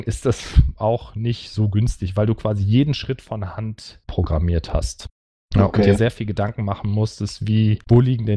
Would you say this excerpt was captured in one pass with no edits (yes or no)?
yes